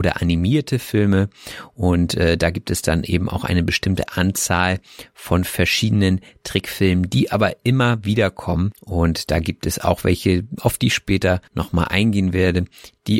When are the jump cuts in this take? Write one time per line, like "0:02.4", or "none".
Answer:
0:11.5